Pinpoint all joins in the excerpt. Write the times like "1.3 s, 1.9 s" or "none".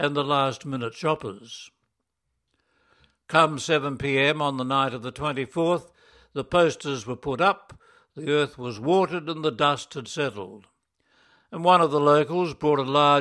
none